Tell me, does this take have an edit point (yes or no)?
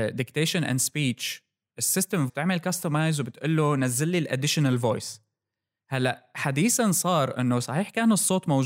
yes